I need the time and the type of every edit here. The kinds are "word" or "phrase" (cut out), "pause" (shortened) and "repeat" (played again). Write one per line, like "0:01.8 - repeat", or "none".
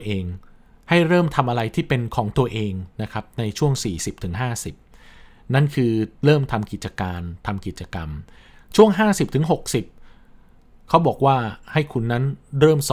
none